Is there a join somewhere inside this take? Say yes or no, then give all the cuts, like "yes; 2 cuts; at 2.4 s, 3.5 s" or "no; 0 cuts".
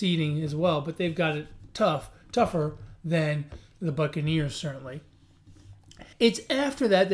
yes; 1 cut; at 6.1 s